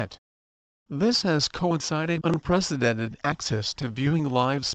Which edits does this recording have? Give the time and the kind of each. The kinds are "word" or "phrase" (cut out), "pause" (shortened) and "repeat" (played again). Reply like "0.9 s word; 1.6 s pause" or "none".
2.2 s word